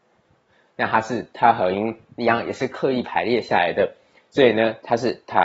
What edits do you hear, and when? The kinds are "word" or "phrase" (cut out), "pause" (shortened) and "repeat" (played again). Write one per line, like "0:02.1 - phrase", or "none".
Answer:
none